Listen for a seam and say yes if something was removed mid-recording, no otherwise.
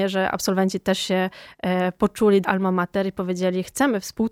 yes